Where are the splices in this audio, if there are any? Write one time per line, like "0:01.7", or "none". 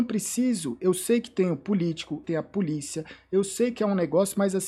0:02.2